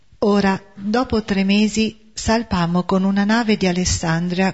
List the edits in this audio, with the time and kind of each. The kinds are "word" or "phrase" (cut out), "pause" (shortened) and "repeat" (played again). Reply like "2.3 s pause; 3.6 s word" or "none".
none